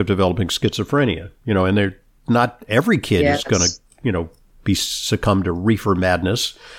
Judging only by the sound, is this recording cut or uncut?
uncut